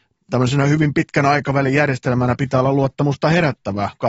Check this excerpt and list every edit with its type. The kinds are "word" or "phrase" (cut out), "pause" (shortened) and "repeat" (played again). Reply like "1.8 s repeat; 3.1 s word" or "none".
none

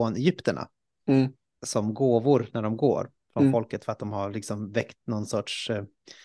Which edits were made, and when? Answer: none

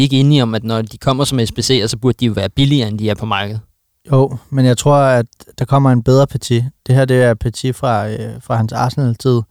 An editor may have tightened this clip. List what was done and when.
none

